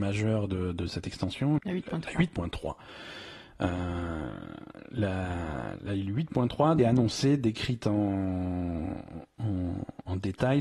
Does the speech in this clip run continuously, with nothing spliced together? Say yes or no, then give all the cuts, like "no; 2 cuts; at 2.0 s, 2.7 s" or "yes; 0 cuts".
no; 2 cuts; at 1.6 s, 6.8 s